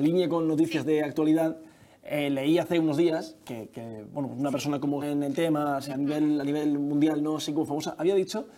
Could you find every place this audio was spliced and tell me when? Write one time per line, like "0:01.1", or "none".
0:05.0
0:05.9

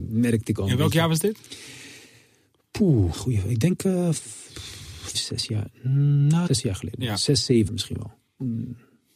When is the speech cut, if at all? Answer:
0:03.1
0:05.1
0:06.5
0:07.7

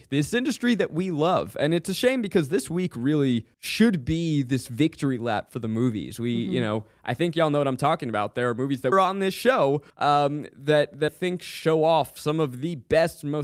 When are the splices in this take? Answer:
0:03.5
0:08.9
0:09.9
0:11.1

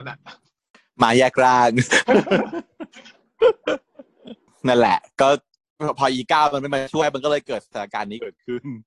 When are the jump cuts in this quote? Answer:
none

